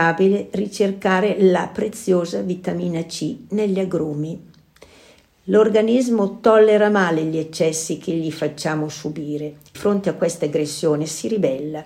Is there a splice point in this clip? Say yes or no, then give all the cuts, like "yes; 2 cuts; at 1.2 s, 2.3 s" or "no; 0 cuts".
yes; 1 cut; at 9.7 s